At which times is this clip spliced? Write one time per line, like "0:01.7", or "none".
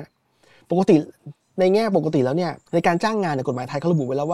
0:02.6